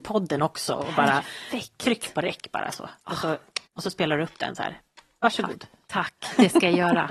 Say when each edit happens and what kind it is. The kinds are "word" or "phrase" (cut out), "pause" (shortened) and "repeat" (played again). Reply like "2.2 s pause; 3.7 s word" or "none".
3.7 s pause